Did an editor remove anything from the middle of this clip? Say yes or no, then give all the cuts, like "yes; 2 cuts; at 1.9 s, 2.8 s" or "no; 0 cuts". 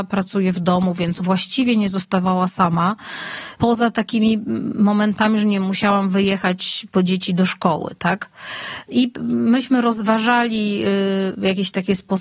yes; 1 cut; at 1.2 s